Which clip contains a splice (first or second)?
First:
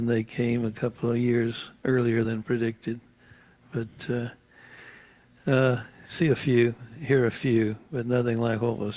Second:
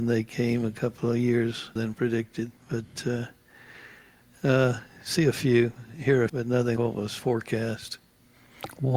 second